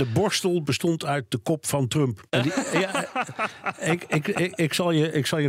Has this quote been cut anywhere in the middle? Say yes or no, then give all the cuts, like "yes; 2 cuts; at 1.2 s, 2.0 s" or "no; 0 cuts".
yes; 1 cut; at 2.3 s